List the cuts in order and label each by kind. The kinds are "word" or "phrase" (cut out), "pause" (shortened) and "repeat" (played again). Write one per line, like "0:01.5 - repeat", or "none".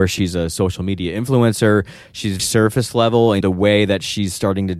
0:02.4 - word
0:03.4 - word